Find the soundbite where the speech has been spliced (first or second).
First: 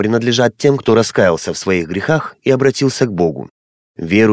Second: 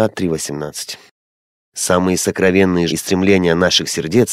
second